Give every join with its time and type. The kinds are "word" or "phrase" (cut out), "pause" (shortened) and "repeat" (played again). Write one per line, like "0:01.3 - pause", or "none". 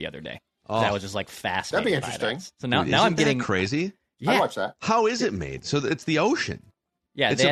none